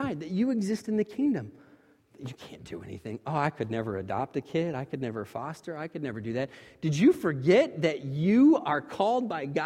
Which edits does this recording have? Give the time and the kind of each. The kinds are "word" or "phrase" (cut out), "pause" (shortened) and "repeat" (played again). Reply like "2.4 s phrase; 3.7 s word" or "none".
none

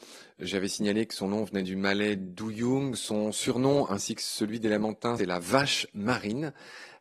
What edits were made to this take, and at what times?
5.2 s word

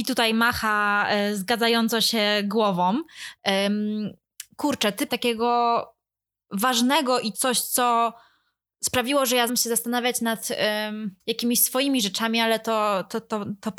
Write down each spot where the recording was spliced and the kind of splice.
5.1 s phrase; 7.3 s word; 9.5 s word; 11.2 s pause

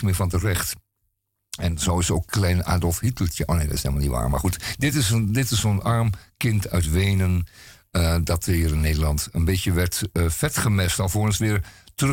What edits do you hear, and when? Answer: none

